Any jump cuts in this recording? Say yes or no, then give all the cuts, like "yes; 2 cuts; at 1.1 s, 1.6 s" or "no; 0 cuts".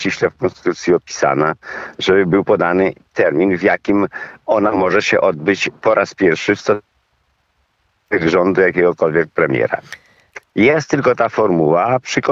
no; 0 cuts